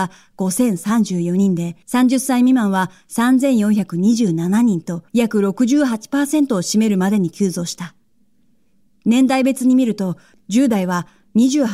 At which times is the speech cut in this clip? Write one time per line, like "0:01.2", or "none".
0:01.8
0:05.1